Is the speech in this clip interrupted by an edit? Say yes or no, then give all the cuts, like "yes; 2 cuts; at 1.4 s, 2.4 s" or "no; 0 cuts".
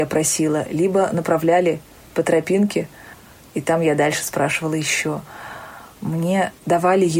no; 0 cuts